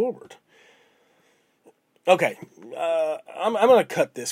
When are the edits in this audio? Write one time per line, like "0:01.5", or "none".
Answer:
0:03.3